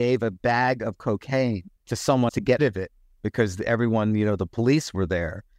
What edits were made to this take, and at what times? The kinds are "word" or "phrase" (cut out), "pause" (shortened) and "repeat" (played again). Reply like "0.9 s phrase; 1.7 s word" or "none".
1.8 s pause; 2.3 s word; 2.6 s word

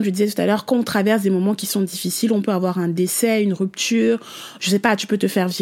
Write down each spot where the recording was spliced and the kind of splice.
none

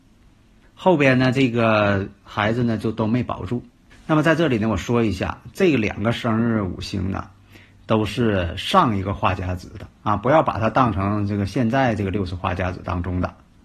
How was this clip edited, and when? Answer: 10.0 s pause

